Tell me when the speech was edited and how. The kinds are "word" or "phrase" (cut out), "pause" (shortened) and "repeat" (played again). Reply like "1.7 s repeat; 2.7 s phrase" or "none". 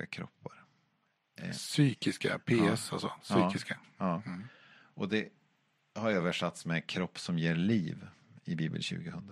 none